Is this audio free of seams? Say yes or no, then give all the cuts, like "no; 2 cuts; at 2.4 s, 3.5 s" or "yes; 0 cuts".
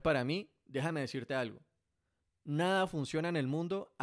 yes; 0 cuts